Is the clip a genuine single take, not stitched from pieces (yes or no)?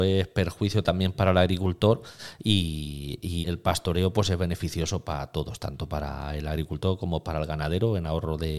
no